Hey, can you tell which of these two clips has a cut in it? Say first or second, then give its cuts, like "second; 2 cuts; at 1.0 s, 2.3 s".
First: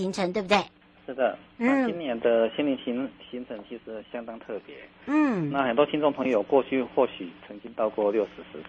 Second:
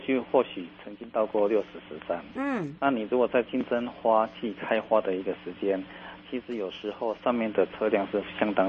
second; 1 cut; at 2.8 s